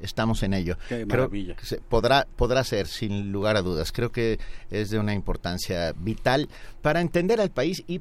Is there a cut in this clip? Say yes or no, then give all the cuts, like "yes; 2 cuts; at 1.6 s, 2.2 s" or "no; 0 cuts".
no; 0 cuts